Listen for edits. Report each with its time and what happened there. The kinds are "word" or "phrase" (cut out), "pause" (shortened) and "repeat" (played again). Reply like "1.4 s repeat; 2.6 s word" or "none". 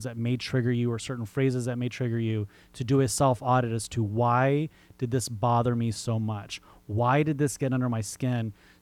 none